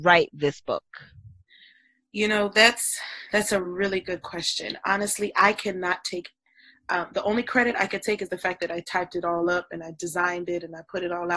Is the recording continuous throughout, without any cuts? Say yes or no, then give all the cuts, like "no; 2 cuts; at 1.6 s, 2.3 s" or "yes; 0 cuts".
yes; 0 cuts